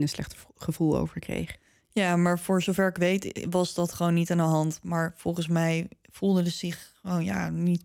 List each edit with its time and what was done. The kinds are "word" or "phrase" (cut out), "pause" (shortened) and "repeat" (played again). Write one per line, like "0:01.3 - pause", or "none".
none

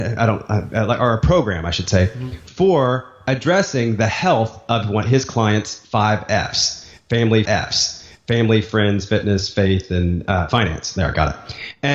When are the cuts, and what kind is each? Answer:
0:07.4 - repeat

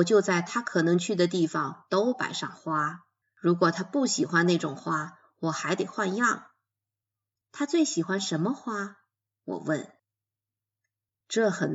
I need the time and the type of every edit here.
0:03.2 - pause
0:07.0 - pause

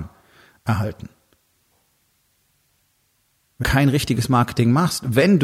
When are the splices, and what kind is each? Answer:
0:03.6 - word

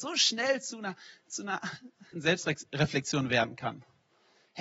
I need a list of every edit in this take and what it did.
0:02.1 - word

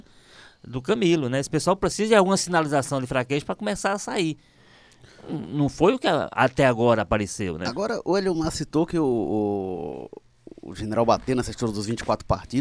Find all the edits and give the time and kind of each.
none

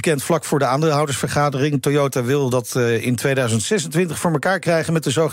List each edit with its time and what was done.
none

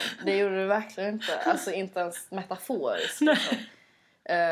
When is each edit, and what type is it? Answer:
none

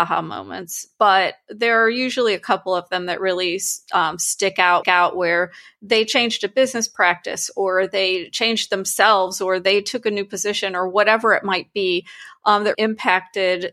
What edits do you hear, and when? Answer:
0:04.8 - repeat
0:12.7 - word

